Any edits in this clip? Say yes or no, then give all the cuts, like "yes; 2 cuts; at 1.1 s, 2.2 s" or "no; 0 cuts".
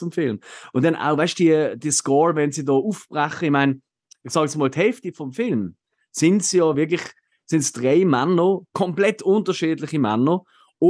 no; 0 cuts